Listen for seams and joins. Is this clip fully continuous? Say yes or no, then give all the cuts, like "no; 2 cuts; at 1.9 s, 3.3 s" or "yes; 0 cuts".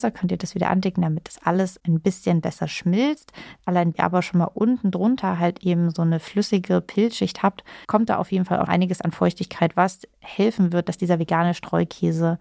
no; 3 cuts; at 3.9 s, 7.8 s, 8.7 s